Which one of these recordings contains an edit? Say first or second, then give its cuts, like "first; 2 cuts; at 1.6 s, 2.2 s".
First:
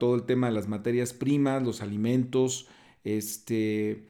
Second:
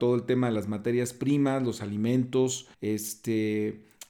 second; 1 cut; at 2.7 s